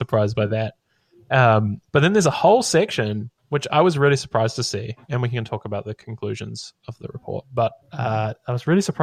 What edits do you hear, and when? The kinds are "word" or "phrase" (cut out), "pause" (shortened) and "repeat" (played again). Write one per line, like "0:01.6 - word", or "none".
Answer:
0:01.9 - pause
0:03.4 - pause
0:07.8 - pause

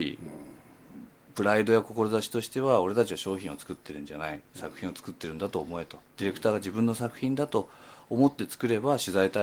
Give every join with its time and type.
0:04.5 - pause
0:06.1 - pause

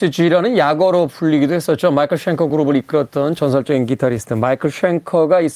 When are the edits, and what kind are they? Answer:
none

